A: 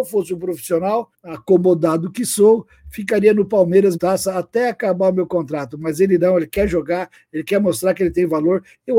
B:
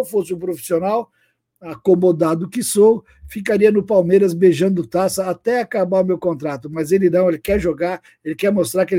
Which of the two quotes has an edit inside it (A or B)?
A